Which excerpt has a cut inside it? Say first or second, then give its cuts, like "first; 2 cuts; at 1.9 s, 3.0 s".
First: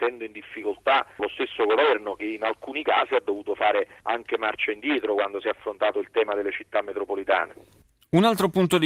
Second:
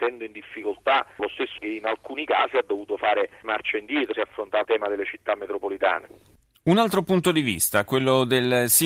second; 4 cuts; at 1.6 s, 3.4 s, 4.1 s, 4.6 s